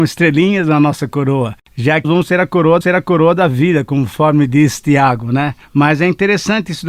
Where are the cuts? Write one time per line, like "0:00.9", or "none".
0:02.0
0:02.8